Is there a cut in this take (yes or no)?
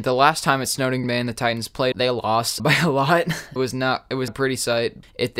yes